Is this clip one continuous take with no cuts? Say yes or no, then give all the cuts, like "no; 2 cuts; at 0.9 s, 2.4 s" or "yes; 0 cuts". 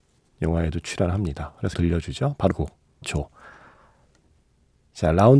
no; 3 cuts; at 1.7 s, 2.5 s, 3.0 s